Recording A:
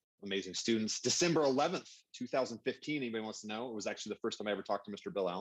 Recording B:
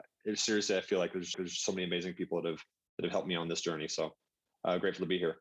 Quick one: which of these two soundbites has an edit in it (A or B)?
B